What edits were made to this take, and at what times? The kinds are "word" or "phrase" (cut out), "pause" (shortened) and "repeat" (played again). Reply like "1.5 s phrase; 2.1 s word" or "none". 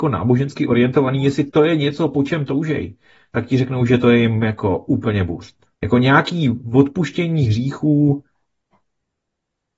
5.7 s pause